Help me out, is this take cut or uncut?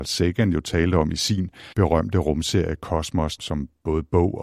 cut